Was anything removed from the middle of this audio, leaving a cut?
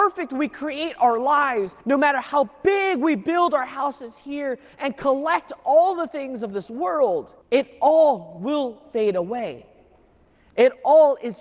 yes; 2 cuts; at 1.8 s, 7.4 s

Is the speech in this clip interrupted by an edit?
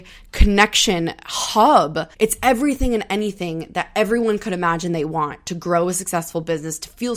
yes; 1 cut; at 2.1 s

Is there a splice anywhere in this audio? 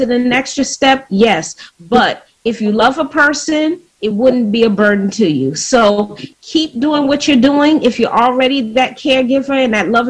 no; 0 cuts

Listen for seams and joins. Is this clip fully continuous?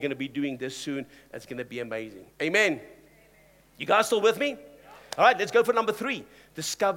yes; 0 cuts

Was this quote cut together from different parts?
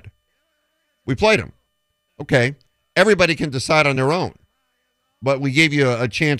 no; 0 cuts

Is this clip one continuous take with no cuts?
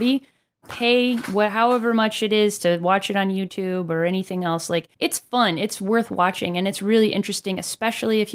no; 1 cut; at 4.9 s

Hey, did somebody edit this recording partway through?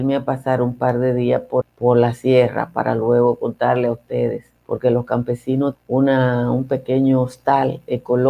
yes; 3 cuts; at 1.6 s, 4.6 s, 5.7 s

